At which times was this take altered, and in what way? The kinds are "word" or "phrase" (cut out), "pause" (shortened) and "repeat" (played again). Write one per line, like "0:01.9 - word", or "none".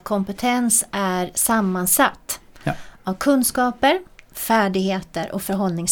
none